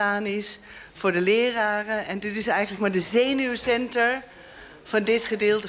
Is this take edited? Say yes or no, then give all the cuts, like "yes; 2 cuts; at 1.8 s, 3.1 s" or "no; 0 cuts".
yes; 1 cut; at 2.8 s